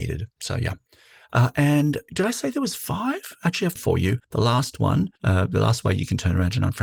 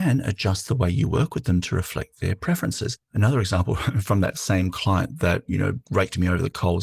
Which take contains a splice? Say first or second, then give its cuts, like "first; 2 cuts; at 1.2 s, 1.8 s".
first; 4 cuts; at 2.1 s, 3.8 s, 4.2 s, 5.2 s